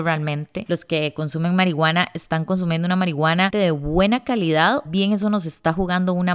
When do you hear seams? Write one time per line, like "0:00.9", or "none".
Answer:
0:03.5
0:04.8